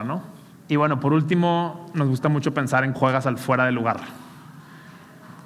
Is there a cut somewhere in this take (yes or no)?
yes